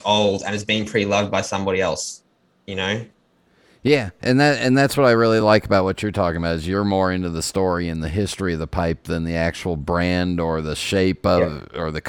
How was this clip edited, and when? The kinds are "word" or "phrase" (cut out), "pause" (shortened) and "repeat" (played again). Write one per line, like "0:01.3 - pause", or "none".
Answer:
none